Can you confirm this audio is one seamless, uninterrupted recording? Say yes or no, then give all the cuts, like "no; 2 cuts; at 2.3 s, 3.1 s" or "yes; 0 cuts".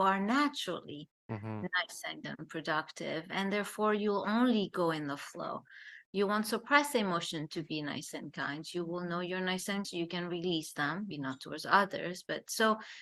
no; 3 cuts; at 2.2 s, 9.8 s, 11.1 s